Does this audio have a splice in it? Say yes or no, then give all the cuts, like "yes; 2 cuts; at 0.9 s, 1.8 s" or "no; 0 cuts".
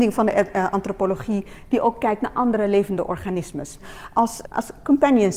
yes; 1 cut; at 4.4 s